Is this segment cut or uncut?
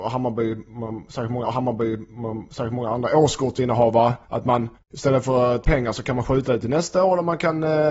cut